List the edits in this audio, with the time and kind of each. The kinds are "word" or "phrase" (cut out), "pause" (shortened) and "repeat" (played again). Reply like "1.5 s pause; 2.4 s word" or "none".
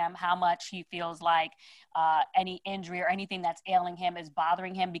none